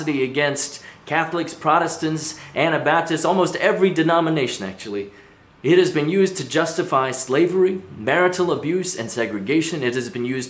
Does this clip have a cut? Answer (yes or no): no